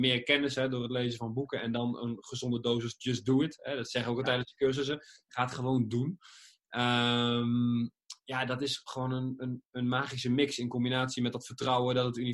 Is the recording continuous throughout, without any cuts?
yes; 0 cuts

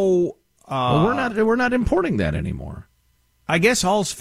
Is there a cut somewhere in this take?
no; 0 cuts

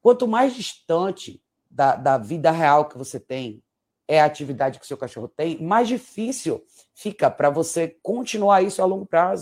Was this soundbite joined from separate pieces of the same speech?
no; 0 cuts

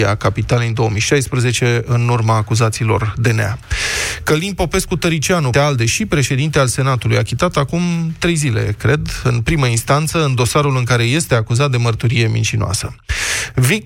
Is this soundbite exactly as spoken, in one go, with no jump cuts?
no; 1 cut; at 5.5 s

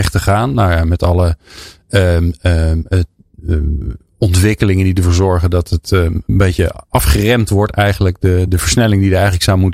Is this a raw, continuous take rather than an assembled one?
yes; 0 cuts

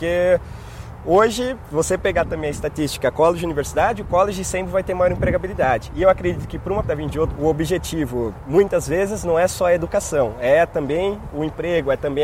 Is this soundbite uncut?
no; 2 cuts; at 6.8 s, 7.4 s

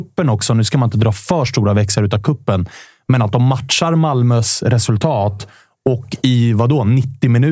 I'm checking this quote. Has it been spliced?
no; 0 cuts

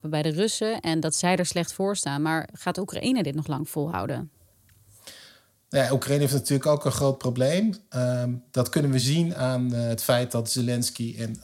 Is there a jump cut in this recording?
no; 0 cuts

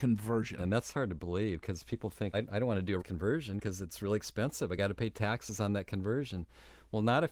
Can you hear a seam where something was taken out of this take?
yes; 2 cuts; at 2.3 s, 3.0 s

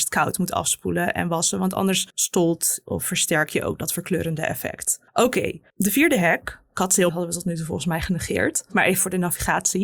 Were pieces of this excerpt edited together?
yes; 4 cuts; at 2.1 s, 5.1 s, 5.7 s, 7.1 s

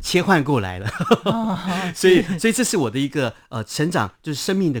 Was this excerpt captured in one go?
yes; 0 cuts

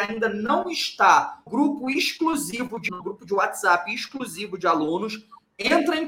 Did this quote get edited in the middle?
yes; 2 cuts; at 1.5 s, 2.9 s

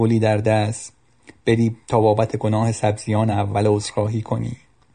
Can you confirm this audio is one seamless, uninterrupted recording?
yes; 0 cuts

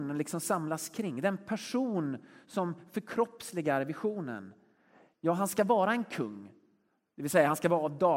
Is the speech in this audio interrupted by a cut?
no; 0 cuts

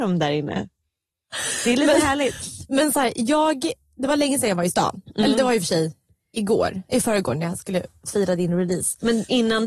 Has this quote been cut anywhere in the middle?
no; 0 cuts

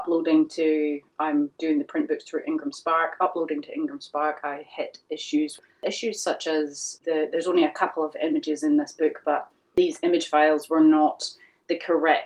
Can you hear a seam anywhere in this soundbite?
no; 0 cuts

